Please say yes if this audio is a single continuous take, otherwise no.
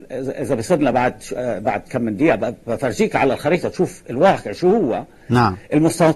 yes